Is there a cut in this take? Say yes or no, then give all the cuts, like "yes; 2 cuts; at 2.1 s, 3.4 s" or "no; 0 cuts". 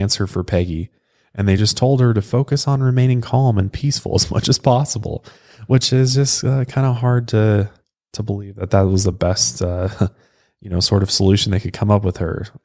no; 0 cuts